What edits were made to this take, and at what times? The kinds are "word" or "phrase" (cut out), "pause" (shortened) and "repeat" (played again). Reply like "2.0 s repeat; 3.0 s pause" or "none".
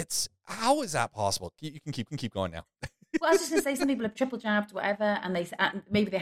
2.1 s repeat; 2.7 s pause; 4.1 s word